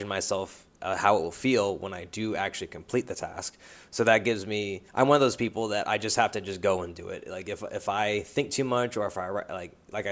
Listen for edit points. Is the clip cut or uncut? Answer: cut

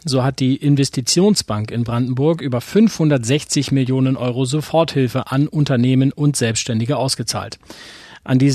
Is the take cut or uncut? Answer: uncut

